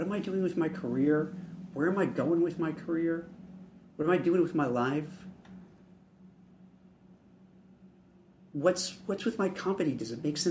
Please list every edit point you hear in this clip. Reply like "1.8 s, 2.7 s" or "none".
none